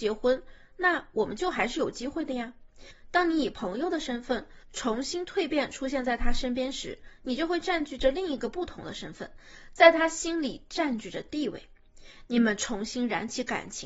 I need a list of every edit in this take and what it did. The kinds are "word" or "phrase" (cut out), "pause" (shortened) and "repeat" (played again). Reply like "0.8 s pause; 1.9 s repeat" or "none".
4.6 s pause